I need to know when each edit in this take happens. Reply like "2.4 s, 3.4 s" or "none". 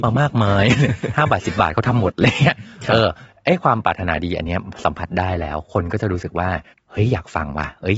6.7 s